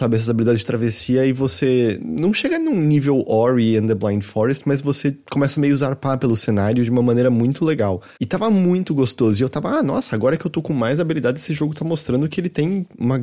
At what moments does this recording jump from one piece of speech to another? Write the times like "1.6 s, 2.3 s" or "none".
8.2 s